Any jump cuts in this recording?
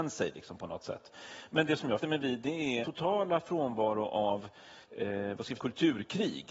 yes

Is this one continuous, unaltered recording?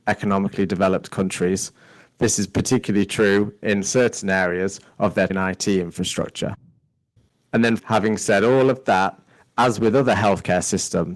no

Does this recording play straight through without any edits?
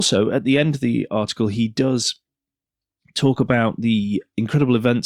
yes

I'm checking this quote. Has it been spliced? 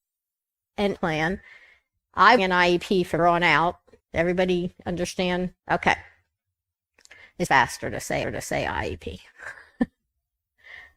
yes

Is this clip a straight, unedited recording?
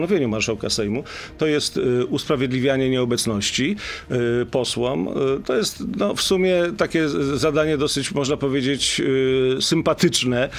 yes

